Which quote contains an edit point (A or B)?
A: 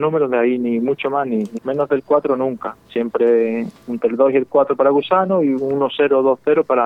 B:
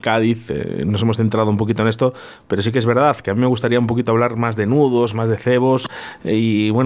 A